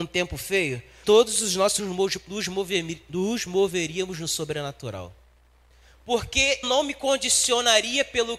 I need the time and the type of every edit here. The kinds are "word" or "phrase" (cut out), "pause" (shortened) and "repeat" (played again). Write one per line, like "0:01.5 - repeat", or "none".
0:01.0 - word
0:01.8 - word
0:06.6 - word